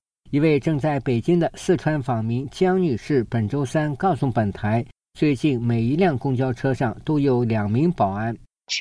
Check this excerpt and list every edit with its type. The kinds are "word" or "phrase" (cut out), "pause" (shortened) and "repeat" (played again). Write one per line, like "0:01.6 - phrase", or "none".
none